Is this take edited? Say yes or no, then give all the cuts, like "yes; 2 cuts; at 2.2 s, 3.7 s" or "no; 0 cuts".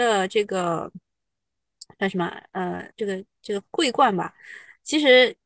yes; 2 cuts; at 2.9 s, 3.3 s